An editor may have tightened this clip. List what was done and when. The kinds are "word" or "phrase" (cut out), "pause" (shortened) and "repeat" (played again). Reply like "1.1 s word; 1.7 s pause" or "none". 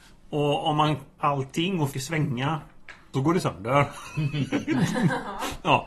1.2 s word; 1.9 s word; 3.1 s word